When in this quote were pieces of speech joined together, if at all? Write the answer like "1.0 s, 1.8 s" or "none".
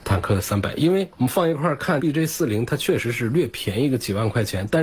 2.0 s